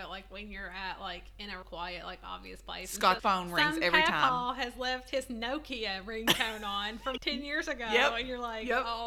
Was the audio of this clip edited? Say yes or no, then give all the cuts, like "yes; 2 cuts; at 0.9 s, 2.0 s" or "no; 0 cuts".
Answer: yes; 3 cuts; at 1.6 s, 3.2 s, 7.2 s